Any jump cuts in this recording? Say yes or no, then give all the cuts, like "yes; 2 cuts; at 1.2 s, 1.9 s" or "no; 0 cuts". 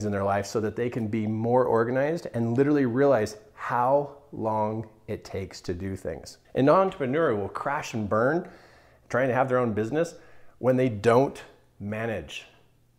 yes; 1 cut; at 6.4 s